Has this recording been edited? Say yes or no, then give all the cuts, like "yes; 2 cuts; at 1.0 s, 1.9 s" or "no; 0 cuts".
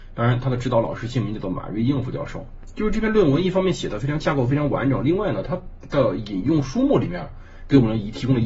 no; 0 cuts